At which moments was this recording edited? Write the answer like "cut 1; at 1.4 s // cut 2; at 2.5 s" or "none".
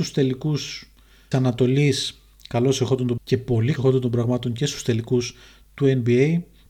cut 1; at 1.3 s // cut 2; at 3.2 s // cut 3; at 3.8 s

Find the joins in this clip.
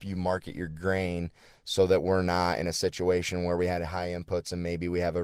none

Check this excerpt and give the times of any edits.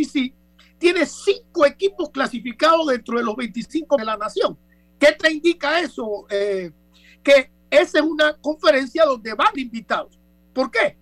cut 1; at 4.0 s // cut 2; at 9.6 s

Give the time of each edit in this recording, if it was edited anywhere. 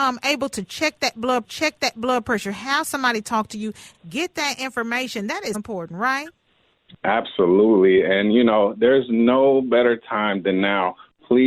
cut 1; at 1.4 s // cut 2; at 5.5 s

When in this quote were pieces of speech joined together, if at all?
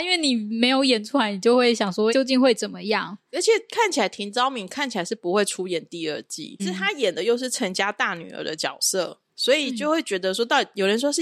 cut 1; at 2.1 s // cut 2; at 6.6 s

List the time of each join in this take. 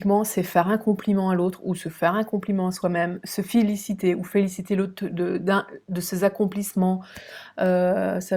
cut 1; at 5.8 s

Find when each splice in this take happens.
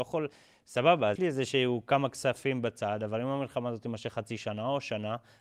cut 1; at 1.2 s

